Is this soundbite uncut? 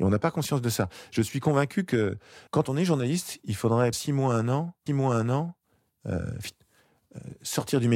no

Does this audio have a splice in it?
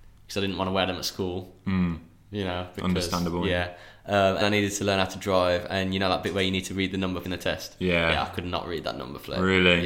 yes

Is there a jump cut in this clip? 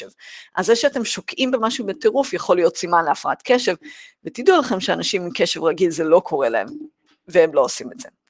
no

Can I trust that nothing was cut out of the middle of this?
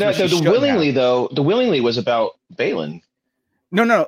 yes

